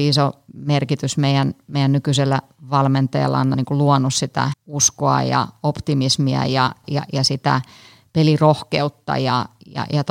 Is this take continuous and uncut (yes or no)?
no